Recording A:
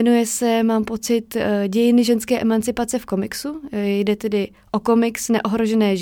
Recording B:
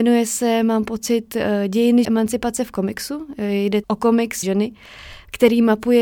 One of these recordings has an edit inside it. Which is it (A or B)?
B